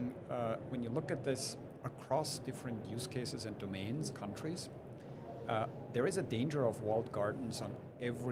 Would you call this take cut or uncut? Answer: cut